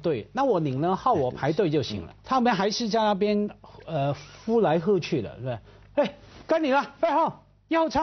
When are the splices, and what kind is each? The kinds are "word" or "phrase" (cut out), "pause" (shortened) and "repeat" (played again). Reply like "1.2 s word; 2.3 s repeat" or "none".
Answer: 2.2 s pause